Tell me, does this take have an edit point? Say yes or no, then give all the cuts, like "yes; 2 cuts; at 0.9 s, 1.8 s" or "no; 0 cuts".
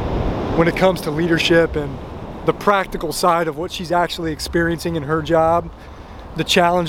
no; 0 cuts